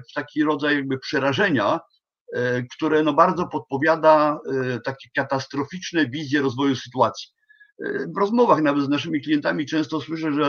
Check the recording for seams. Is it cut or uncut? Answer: uncut